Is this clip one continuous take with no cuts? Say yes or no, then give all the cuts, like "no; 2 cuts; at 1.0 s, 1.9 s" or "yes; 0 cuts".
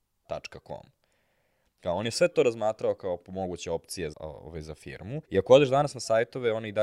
no; 2 cuts; at 4.1 s, 5.2 s